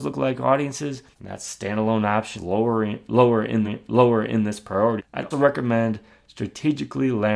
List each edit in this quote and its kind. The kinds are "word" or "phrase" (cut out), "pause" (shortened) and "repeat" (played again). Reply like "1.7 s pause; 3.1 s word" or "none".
1.1 s pause; 2.4 s word; 3.6 s repeat; 5.0 s word; 5.3 s word